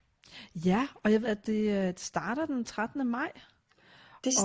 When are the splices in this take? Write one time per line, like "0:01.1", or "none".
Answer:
0:01.2

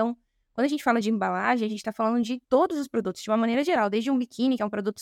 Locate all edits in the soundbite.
0:02.4

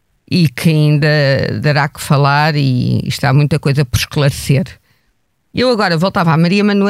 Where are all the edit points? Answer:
none

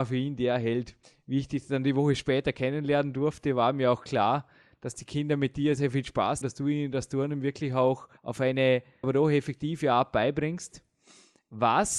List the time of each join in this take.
0:01.0
0:05.8
0:06.4
0:08.2
0:09.0

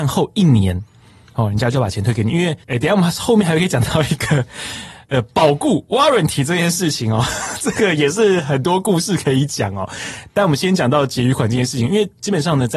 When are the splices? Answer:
0:02.6

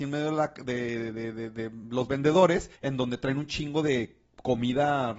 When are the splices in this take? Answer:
0:02.8

